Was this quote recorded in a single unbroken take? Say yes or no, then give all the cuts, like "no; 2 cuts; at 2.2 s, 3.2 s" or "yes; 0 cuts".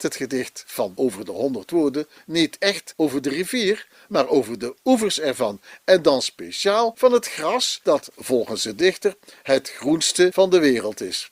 yes; 0 cuts